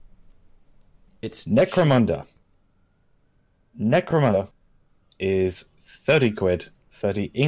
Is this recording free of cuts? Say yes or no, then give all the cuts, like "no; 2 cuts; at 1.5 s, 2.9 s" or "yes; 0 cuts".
yes; 0 cuts